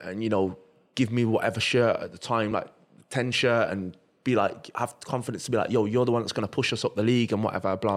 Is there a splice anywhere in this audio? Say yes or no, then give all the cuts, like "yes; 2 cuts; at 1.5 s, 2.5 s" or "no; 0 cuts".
no; 0 cuts